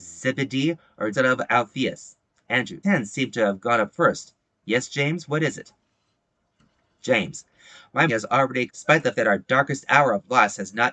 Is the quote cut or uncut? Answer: cut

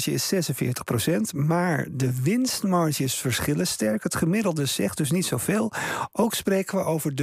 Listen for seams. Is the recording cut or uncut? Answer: uncut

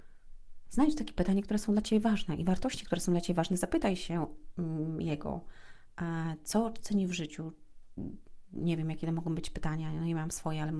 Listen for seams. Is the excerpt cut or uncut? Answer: uncut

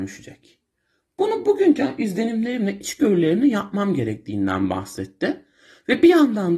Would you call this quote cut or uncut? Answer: uncut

